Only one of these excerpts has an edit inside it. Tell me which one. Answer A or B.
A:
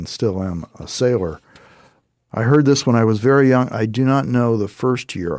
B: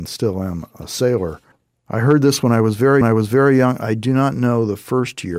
B